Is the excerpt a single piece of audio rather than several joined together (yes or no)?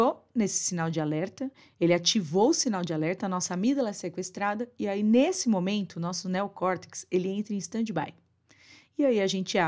yes